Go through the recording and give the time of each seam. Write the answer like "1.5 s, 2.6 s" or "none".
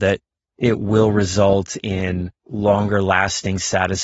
2.4 s